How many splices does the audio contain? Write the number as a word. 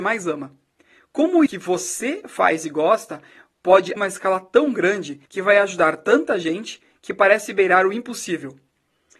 three